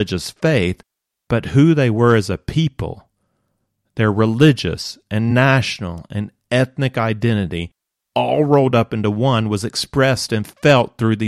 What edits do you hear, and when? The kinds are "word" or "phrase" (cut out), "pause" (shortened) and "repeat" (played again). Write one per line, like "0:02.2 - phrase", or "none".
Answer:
none